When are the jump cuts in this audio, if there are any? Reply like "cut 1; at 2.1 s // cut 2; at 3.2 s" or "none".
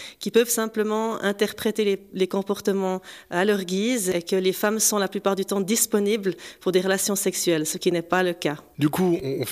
none

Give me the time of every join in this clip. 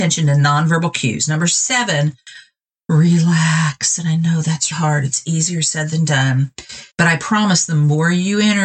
cut 1; at 4.7 s // cut 2; at 6.9 s

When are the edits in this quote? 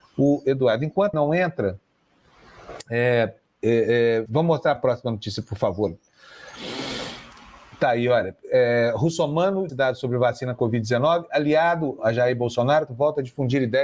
cut 1; at 1.1 s // cut 2; at 4.3 s // cut 3; at 4.8 s // cut 4; at 9.7 s // cut 5; at 10.6 s // cut 6; at 12.0 s // cut 7; at 12.9 s

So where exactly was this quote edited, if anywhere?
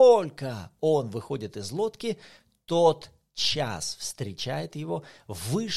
none

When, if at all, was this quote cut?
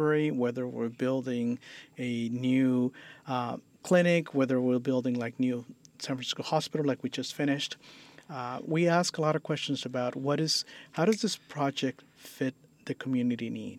none

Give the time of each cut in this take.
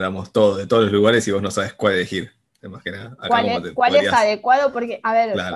none

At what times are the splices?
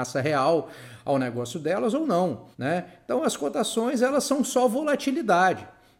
cut 1; at 2.5 s

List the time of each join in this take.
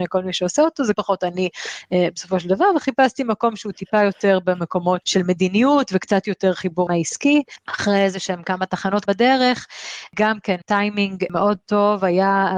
cut 1; at 0.9 s // cut 2; at 5.0 s // cut 3; at 6.9 s // cut 4; at 9.1 s // cut 5; at 10.6 s

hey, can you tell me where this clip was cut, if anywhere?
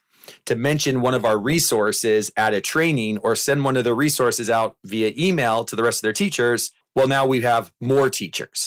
cut 1; at 6.8 s

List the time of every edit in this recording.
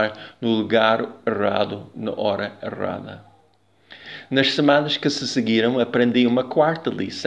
none

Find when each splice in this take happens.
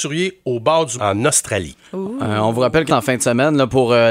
cut 1; at 1.0 s // cut 2; at 2.9 s

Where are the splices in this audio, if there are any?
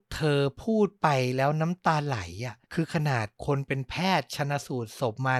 cut 1; at 2.6 s // cut 2; at 3.4 s

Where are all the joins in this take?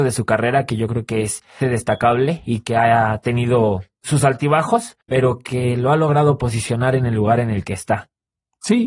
cut 1; at 1.6 s // cut 2; at 5.0 s

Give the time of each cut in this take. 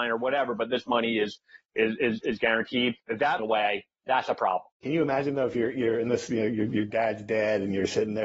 cut 1; at 3.0 s // cut 2; at 3.4 s // cut 3; at 4.7 s

